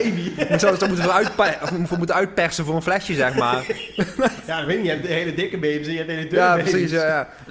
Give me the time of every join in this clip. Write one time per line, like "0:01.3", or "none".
none